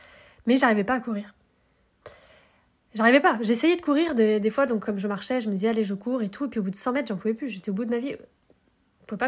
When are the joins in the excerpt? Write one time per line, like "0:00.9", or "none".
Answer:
none